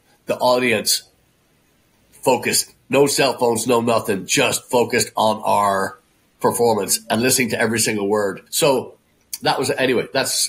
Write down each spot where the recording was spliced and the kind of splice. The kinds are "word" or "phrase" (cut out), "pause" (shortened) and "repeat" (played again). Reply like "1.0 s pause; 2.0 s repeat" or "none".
8.5 s pause